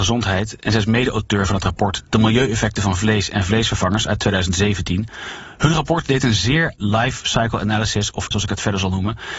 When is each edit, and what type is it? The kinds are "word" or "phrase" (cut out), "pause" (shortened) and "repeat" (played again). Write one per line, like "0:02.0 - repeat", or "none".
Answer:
0:06.8 - word
0:08.3 - word